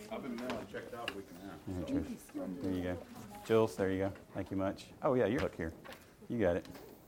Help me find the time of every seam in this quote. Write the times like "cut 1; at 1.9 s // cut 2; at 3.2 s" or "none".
cut 1; at 1.1 s // cut 2; at 4.2 s // cut 3; at 5.4 s